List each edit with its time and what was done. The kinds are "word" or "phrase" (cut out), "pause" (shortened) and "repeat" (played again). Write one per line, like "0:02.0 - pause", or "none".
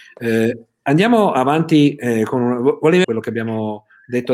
0:03.0 - phrase